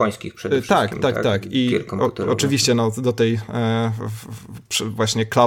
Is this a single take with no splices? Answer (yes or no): yes